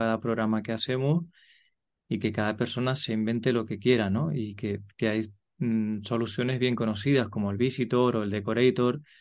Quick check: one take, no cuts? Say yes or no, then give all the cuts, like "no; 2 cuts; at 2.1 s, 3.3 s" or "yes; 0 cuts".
yes; 0 cuts